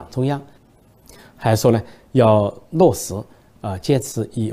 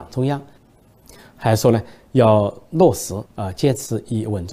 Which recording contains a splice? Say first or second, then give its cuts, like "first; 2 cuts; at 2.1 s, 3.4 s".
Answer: second; 1 cut; at 3.3 s